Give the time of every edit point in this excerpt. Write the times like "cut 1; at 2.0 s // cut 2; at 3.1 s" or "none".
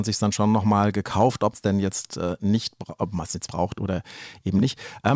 cut 1; at 1.5 s // cut 2; at 3.5 s